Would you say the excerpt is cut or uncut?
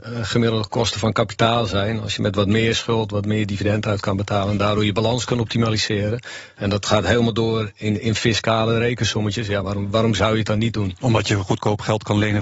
uncut